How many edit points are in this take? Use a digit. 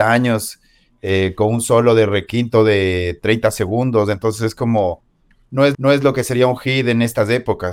1